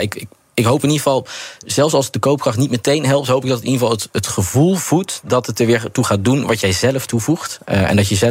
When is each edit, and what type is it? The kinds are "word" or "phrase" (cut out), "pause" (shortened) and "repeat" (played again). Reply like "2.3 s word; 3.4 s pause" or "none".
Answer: none

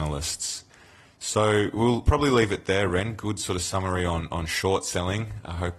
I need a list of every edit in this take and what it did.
none

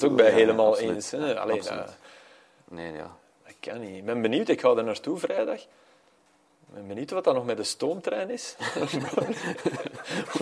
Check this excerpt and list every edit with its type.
none

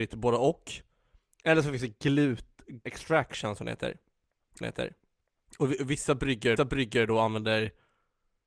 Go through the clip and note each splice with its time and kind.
2.9 s word; 4.6 s repeat; 6.6 s repeat

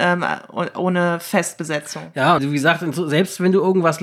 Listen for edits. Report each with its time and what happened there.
2.4 s phrase

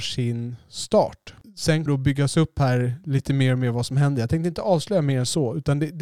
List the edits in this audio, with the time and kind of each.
1.9 s word

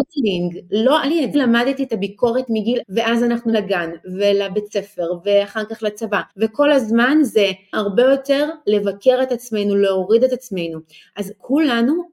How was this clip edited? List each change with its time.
1.0 s word; 1.3 s phrase; 2.5 s word; 2.8 s word; 3.5 s word; 6.3 s pause; 7.7 s word

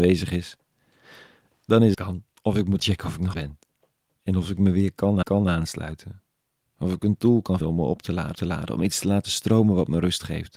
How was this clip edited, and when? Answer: 1.9 s phrase; 2.3 s pause; 2.8 s word; 3.3 s word; 5.2 s repeat; 7.6 s word; 8.3 s repeat

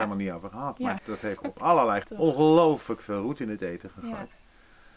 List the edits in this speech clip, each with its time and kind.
1.0 s word; 1.4 s word; 2.0 s word

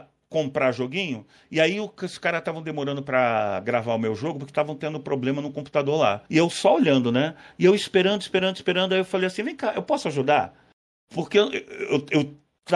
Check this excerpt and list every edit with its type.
6.3 s pause

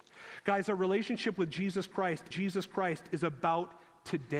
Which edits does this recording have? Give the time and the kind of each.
2.3 s repeat

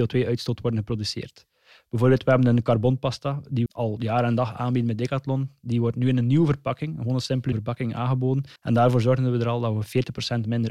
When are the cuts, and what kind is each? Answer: 3.7 s word; 7.5 s word; 8.6 s pause

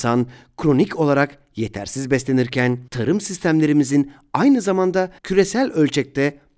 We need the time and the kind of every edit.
2.9 s pause; 5.2 s pause

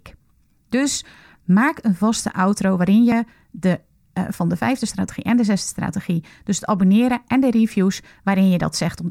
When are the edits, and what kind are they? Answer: none

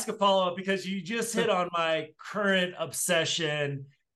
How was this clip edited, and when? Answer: none

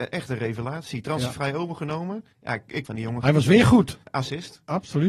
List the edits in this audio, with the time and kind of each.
2.3 s pause; 2.8 s phrase; 4.0 s pause

